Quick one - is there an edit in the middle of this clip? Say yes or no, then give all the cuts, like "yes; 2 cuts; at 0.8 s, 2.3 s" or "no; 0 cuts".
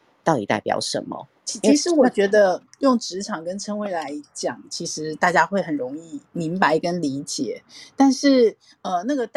yes; 2 cuts; at 1.4 s, 6.3 s